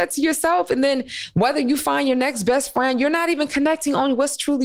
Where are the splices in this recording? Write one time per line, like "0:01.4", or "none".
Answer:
none